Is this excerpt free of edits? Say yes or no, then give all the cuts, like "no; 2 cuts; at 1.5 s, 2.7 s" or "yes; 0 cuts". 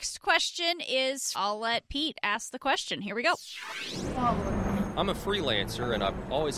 no; 1 cut; at 1.3 s